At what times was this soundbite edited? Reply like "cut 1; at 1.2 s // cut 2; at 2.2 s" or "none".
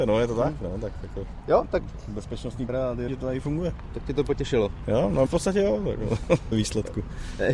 cut 1; at 2.7 s // cut 2; at 3.1 s // cut 3; at 5.3 s // cut 4; at 6.5 s